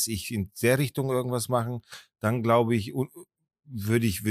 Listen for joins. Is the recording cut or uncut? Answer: uncut